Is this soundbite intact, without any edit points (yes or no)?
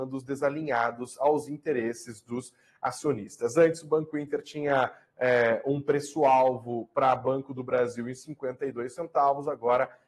yes